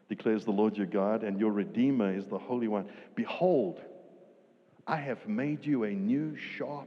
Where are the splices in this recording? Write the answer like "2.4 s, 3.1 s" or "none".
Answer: none